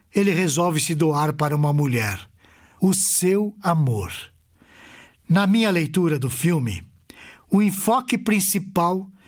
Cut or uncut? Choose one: uncut